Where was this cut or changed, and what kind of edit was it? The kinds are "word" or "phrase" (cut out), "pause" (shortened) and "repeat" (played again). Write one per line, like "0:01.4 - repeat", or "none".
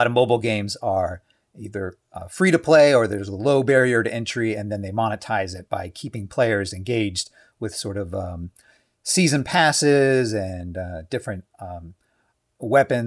none